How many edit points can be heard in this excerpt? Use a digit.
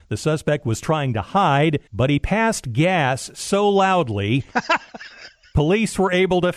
1